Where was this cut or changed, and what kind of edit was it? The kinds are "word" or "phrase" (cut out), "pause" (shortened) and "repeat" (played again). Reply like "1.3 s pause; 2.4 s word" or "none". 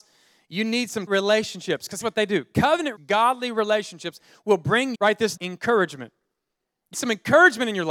1.1 s word; 2.0 s word; 3.0 s word; 4.9 s word; 5.4 s word; 6.9 s word